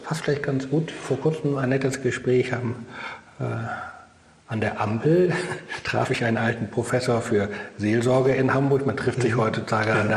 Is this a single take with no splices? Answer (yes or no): yes